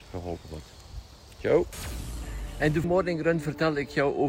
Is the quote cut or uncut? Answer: cut